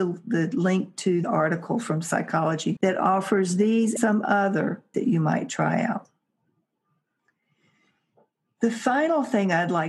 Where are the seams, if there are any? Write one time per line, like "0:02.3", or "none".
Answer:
0:01.2
0:02.8
0:04.0
0:04.9